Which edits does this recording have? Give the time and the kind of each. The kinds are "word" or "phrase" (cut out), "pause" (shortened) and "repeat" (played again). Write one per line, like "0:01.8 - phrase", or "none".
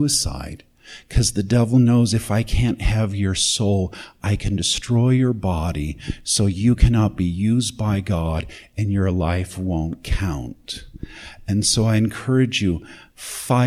none